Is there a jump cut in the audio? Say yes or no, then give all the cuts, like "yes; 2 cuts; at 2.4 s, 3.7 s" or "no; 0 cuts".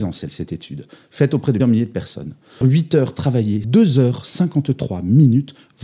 yes; 3 cuts; at 1.6 s, 2.6 s, 3.6 s